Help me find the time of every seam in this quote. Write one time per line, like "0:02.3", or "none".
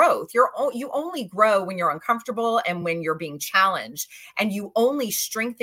none